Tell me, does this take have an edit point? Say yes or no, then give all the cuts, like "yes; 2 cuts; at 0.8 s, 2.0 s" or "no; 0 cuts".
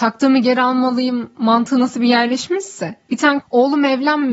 yes; 1 cut; at 3.4 s